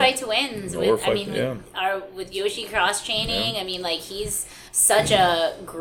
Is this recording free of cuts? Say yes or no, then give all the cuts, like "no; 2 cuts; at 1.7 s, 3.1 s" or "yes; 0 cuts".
no; 1 cut; at 4.7 s